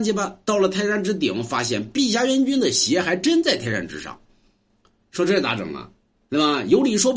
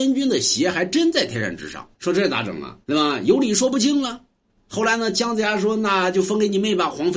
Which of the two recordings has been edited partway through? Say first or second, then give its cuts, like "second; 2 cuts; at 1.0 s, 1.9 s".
second; 2 cuts; at 1.9 s, 2.8 s